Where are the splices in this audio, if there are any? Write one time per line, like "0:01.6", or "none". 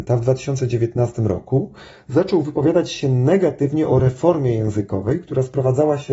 none